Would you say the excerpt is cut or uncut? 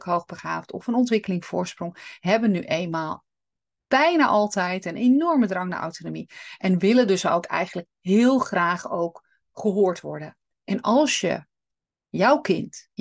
uncut